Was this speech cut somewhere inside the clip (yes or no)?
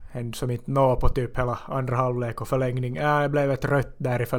no